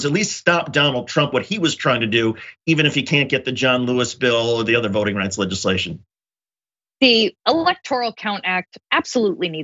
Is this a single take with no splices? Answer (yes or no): yes